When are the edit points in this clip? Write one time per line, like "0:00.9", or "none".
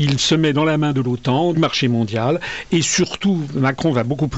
0:01.5